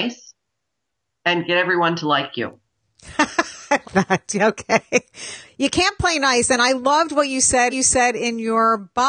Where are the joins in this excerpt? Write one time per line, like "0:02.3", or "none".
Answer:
0:02.7
0:03.8
0:07.7